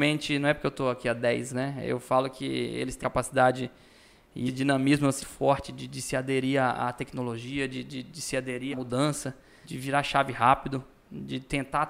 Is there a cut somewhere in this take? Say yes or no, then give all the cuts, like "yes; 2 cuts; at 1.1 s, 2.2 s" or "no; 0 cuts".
yes; 7 cuts; at 1.5 s, 3.0 s, 4.5 s, 5.2 s, 8.0 s, 8.7 s, 9.6 s